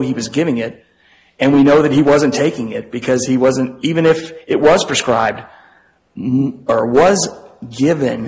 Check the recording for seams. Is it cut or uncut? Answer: uncut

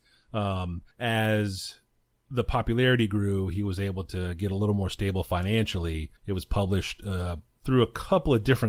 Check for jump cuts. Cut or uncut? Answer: cut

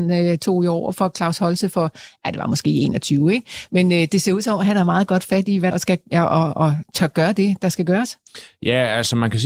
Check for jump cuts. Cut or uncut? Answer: cut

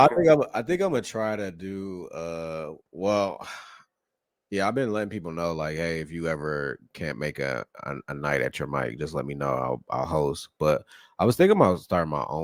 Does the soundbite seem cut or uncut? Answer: cut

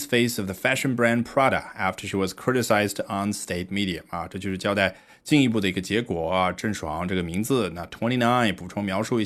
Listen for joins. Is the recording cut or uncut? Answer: uncut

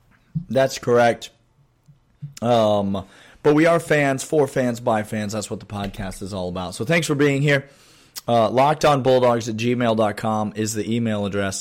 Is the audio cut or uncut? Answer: uncut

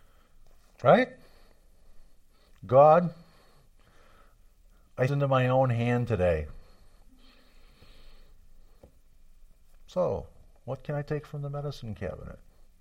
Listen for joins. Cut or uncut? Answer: cut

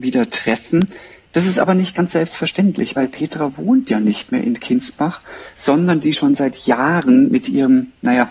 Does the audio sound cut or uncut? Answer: uncut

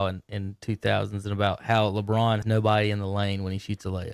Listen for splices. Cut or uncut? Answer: cut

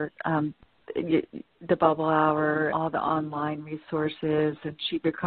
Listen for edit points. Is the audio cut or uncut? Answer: cut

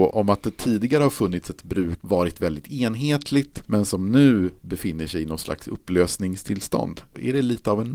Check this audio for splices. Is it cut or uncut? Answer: cut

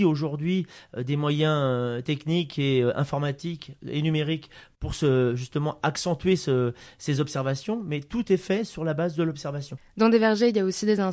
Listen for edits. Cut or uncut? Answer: uncut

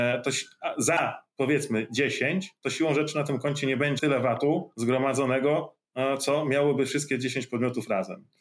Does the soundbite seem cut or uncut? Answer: cut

